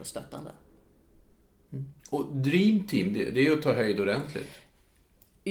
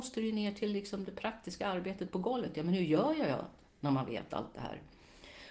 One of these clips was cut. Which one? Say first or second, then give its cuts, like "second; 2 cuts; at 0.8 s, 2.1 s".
first; 1 cut; at 2.0 s